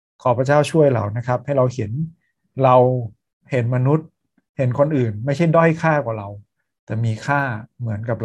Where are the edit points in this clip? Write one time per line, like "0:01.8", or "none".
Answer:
none